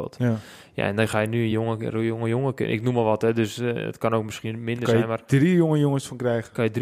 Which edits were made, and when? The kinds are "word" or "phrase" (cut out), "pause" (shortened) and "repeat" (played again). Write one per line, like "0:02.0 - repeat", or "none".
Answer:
none